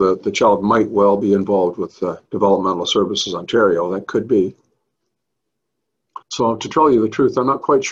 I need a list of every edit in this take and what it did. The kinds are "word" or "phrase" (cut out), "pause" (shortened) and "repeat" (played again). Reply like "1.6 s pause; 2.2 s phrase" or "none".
2.3 s pause; 6.2 s pause